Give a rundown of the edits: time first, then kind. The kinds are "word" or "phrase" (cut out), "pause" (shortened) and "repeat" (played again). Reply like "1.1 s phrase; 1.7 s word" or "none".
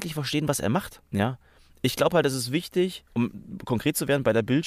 1.1 s pause; 3.1 s pause